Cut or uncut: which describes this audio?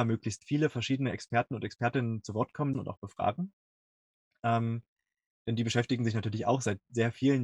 cut